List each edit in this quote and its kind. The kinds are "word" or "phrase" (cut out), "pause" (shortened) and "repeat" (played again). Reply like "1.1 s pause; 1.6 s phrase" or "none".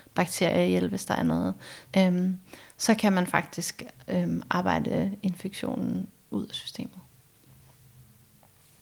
1.8 s phrase